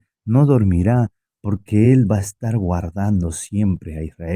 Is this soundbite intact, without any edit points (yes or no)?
yes